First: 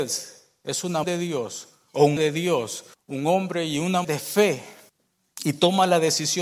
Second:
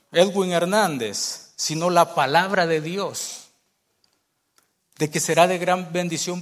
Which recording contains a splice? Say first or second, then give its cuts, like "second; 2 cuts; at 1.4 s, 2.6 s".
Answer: first; 5 cuts; at 1.0 s, 2.2 s, 2.9 s, 4.0 s, 4.9 s